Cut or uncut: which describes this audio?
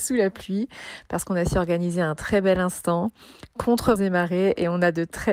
cut